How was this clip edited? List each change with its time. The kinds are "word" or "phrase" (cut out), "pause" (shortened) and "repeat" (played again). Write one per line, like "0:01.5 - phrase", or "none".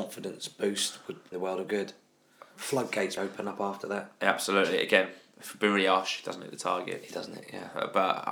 0:01.3 - phrase
0:03.2 - word